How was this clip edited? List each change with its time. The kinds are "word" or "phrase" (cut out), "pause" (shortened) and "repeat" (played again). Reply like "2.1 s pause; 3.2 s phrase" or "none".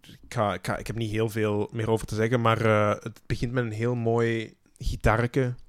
none